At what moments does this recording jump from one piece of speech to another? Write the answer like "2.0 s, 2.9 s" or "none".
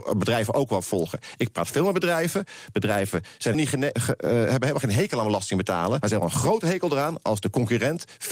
3.5 s, 3.9 s, 6.0 s